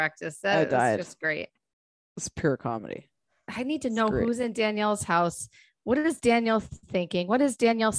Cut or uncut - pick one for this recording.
uncut